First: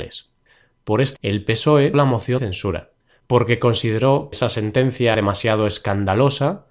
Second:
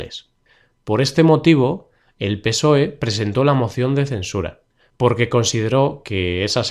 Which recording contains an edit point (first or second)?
first